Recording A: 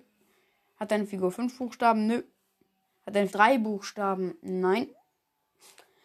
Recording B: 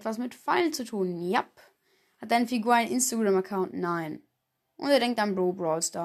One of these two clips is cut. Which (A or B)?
A